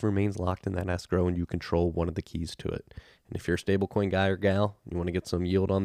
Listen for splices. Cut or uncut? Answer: uncut